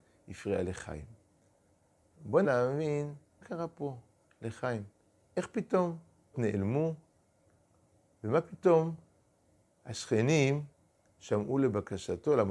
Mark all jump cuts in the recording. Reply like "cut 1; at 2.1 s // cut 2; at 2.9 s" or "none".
cut 1; at 2.4 s // cut 2; at 3.4 s // cut 3; at 6.3 s